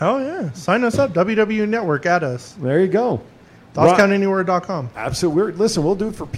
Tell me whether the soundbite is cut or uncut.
uncut